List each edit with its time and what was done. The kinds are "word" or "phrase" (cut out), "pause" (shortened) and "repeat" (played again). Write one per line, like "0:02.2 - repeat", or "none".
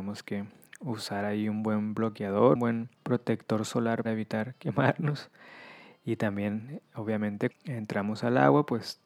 0:02.5 - word
0:02.9 - pause
0:04.0 - word
0:07.5 - word